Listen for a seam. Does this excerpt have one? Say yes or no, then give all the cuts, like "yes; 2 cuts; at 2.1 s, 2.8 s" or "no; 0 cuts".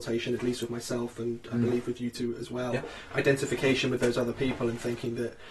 no; 0 cuts